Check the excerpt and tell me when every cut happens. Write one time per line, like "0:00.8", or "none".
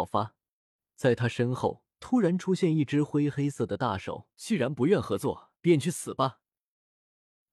0:01.9
0:04.3
0:05.6